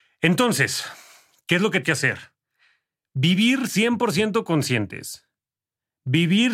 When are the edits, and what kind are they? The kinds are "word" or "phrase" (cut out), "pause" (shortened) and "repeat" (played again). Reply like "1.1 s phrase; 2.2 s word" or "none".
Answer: 1.8 s word

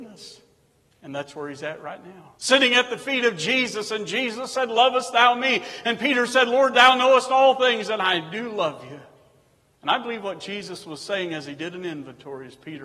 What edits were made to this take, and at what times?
2.4 s pause

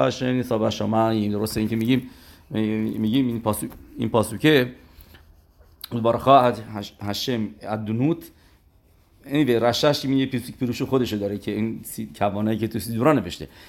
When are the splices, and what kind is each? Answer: none

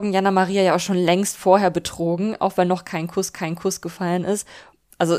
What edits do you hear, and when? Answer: 3.3 s repeat

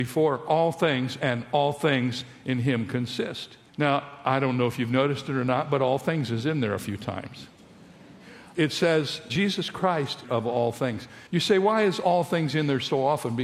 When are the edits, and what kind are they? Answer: 3.7 s pause; 9.3 s word; 10.2 s phrase; 11.3 s pause

